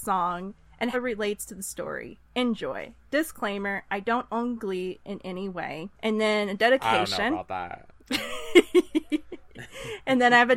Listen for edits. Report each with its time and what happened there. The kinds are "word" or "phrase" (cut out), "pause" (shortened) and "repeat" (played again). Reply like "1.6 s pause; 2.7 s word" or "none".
0.9 s word; 5.9 s pause